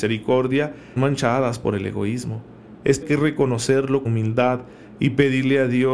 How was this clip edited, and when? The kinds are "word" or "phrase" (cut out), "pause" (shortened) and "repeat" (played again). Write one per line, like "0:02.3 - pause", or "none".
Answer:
0:01.0 - word
0:03.0 - word
0:04.0 - word